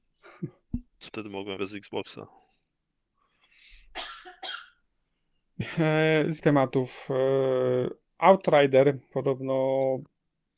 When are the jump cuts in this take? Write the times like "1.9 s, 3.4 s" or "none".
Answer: 1.1 s, 1.6 s, 5.6 s, 6.4 s

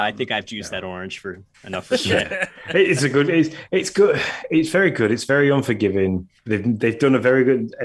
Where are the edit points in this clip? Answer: 6.4 s

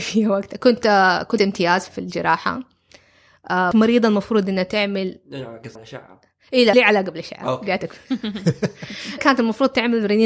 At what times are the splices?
1.4 s, 1.9 s, 3.7 s, 5.8 s, 6.7 s, 9.2 s

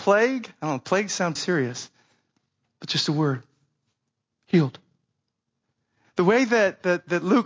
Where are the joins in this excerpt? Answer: 1.4 s, 5.6 s

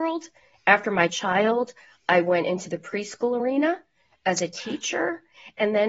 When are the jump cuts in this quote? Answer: none

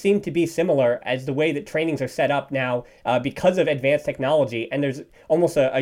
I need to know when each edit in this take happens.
none

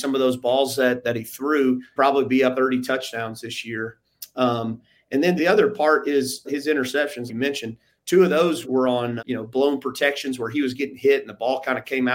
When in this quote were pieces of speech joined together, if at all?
1.0 s, 2.0 s, 2.5 s, 5.4 s, 6.4 s, 7.3 s, 8.6 s, 9.2 s

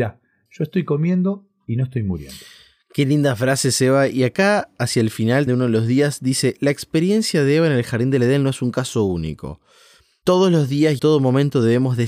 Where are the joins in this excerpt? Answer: 5.5 s, 11.0 s

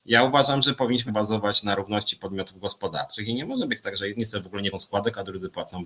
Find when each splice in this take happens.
1.1 s, 4.7 s

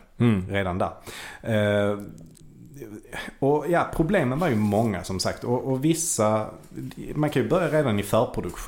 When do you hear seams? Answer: none

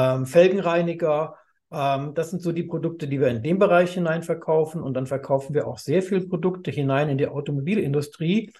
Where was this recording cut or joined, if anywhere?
none

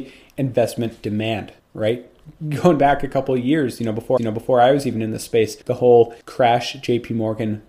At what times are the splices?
1.6 s, 4.2 s, 5.6 s, 6.2 s

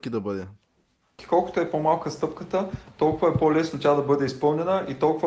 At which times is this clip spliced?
none

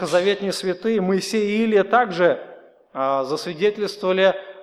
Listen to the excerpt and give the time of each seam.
none

